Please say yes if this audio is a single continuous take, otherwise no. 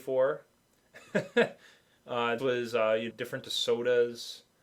no